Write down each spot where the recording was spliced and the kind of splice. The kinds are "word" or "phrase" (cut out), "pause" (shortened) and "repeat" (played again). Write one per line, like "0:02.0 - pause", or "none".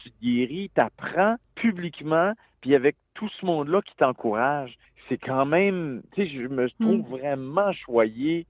0:01.4 - pause
0:04.8 - pause

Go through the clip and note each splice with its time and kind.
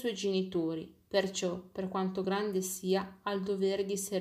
none

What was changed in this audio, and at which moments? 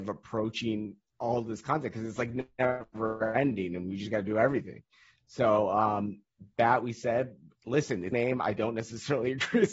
0:08.1 - phrase

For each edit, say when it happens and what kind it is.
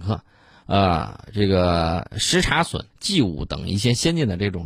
0:02.9 - pause

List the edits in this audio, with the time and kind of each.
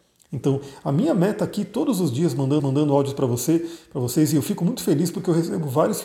0:02.6 - repeat

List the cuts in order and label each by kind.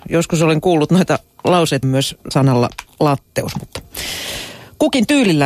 0:01.8 - word
0:02.3 - word

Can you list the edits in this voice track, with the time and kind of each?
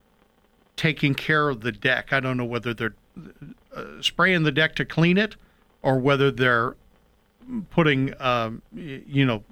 none

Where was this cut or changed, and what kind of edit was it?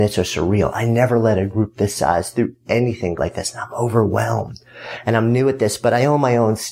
0:03.2 - word

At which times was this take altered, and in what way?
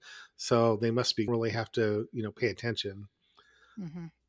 0:01.3 - phrase

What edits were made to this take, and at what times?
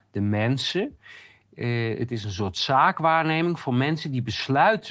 none

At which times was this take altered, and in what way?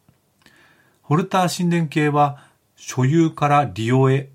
none

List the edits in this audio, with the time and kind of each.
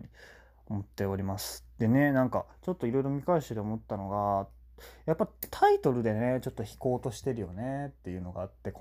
0:02.5 - pause

